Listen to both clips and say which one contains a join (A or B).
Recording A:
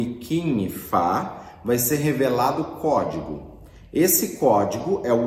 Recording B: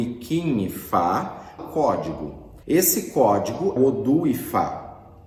B